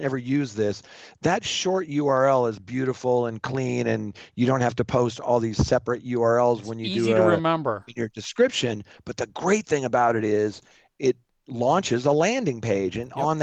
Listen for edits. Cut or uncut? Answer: uncut